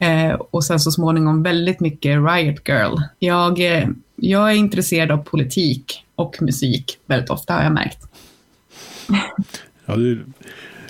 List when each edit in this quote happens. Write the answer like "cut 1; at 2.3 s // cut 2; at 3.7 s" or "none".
cut 1; at 3.1 s

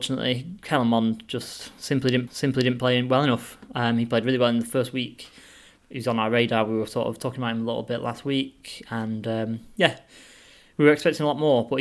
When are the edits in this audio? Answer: cut 1; at 2.3 s

